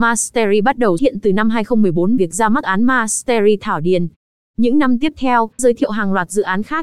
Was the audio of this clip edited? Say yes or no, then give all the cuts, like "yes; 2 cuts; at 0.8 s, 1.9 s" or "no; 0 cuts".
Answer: yes; 4 cuts; at 1.0 s, 2.2 s, 2.6 s, 5.6 s